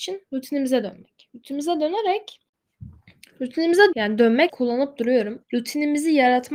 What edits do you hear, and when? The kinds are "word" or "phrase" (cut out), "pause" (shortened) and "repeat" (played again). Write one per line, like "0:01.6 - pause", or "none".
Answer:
0:03.9 - word
0:04.5 - word
0:05.4 - word

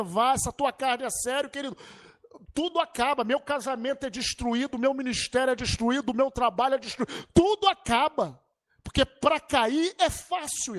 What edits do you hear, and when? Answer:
none

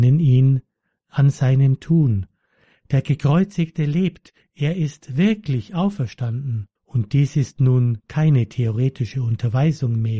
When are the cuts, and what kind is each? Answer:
0:06.8 - pause

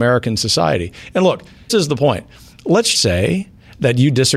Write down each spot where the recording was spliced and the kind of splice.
0:01.7 - word
0:02.9 - word

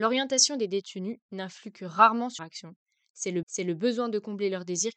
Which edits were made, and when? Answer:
0:02.4 - word
0:03.4 - repeat

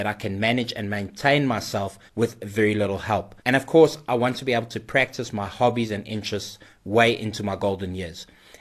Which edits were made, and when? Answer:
0:02.1 - pause
0:03.4 - pause

